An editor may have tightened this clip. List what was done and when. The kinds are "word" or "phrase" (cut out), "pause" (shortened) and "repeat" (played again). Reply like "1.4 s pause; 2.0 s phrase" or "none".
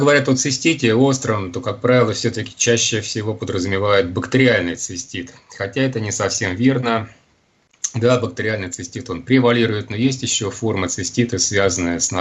none